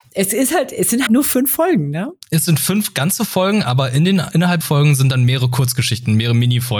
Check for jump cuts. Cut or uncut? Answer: cut